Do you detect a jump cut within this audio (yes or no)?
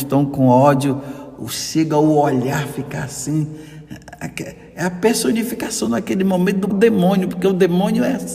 yes